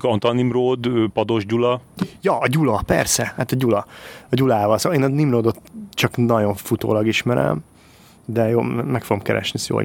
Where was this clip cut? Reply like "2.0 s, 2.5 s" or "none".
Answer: none